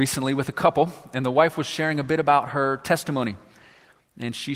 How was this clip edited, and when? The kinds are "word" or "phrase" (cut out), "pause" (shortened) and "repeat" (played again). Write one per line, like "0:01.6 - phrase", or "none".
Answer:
none